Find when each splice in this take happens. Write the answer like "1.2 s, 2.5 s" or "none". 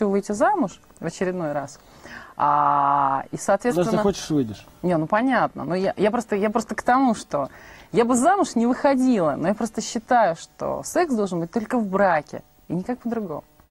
none